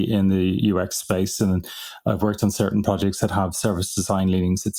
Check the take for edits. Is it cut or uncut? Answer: uncut